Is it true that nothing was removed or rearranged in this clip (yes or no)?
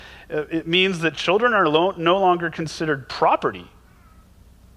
yes